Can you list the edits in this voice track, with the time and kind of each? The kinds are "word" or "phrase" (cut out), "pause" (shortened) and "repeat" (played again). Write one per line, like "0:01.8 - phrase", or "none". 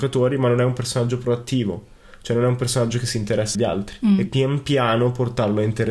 0:03.5 - word
0:04.3 - word